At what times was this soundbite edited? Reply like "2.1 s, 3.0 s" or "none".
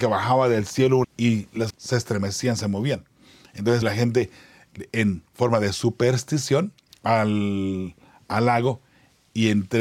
1.0 s, 1.7 s, 3.8 s, 6.9 s